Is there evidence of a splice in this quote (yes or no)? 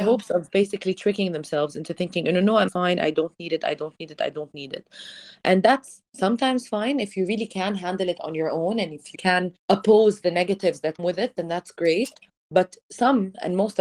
yes